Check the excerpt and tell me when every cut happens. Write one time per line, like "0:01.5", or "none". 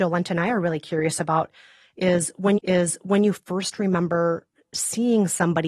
0:02.6